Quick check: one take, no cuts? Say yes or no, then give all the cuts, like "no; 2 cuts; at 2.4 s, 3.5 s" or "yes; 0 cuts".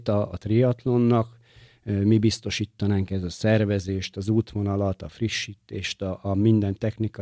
yes; 0 cuts